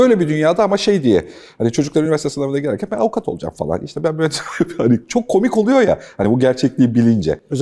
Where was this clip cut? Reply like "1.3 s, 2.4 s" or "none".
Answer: none